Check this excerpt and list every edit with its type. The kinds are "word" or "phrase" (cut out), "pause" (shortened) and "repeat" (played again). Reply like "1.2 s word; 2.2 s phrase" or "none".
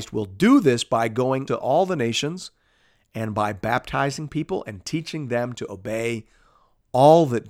1.5 s word